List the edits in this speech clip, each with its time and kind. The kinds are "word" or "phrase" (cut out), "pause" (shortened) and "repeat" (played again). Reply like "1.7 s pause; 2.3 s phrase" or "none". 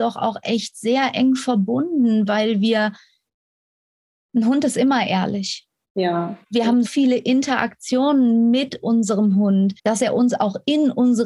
6.4 s pause; 6.8 s word; 9.8 s pause